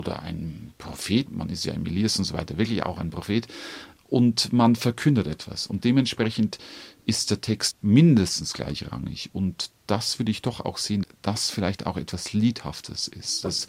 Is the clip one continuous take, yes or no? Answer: no